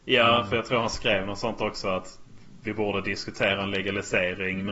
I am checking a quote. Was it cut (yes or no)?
no